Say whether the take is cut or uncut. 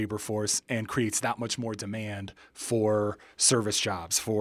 uncut